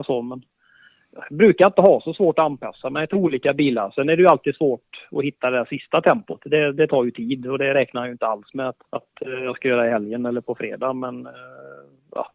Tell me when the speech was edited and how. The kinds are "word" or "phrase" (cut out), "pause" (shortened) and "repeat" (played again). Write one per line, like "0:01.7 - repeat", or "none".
0:08.9 - pause